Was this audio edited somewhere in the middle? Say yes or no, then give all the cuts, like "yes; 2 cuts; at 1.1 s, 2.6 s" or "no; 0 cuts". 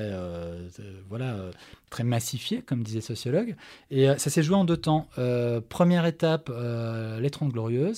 no; 0 cuts